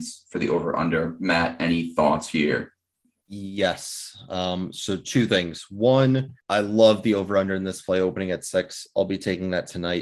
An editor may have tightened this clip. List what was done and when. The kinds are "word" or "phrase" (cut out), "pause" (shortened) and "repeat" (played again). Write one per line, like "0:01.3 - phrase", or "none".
0:06.4 - pause